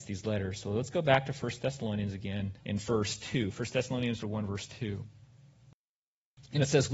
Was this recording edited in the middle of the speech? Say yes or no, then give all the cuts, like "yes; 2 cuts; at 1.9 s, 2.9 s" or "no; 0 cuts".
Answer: yes; 2 cuts; at 2.6 s, 4.2 s